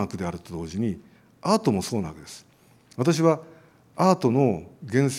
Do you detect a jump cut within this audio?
no; 0 cuts

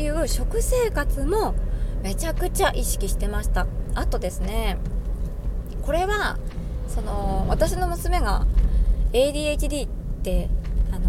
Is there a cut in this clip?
no; 0 cuts

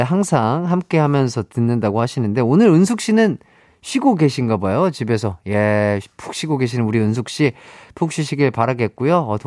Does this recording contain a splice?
no; 0 cuts

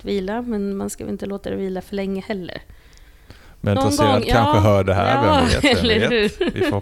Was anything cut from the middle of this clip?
yes; 1 cut; at 3.8 s

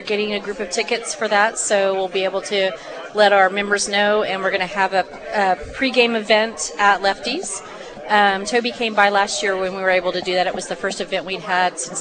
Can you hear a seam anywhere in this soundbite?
no; 0 cuts

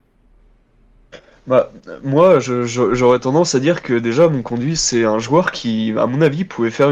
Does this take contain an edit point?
no; 0 cuts

